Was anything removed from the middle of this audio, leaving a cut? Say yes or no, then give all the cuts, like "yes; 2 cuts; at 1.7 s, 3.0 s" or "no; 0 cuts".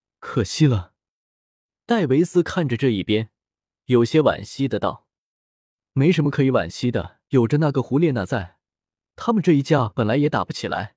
yes; 1 cut; at 7.3 s